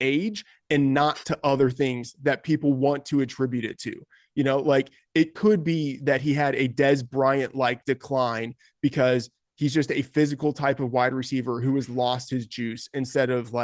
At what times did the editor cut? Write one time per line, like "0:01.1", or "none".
none